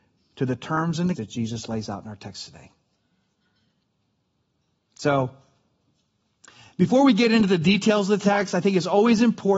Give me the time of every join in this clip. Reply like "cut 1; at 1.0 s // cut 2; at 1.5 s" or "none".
cut 1; at 1.2 s